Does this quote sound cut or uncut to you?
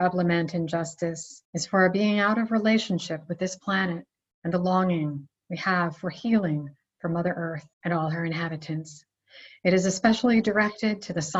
cut